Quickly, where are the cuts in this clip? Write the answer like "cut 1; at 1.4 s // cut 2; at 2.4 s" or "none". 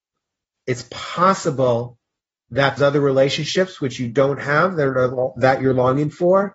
cut 1; at 2.8 s